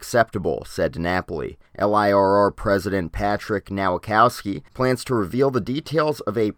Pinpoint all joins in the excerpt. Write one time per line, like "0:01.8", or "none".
0:01.7
0:04.7